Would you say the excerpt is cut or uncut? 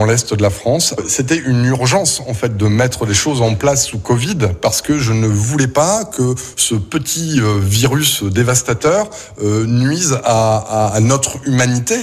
uncut